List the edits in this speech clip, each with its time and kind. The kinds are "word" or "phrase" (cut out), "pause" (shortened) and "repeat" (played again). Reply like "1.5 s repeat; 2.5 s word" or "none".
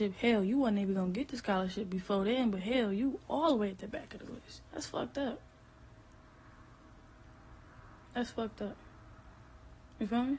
4.7 s pause; 8.0 s pause